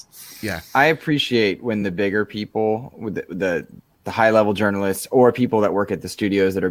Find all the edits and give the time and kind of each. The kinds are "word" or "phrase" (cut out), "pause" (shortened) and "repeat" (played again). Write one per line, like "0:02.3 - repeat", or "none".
none